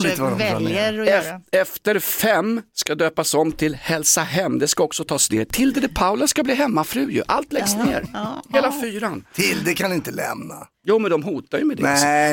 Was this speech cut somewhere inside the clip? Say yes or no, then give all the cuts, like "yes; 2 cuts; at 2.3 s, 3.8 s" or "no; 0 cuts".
yes; 1 cut; at 10.7 s